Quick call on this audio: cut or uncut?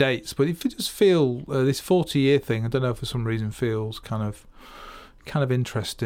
uncut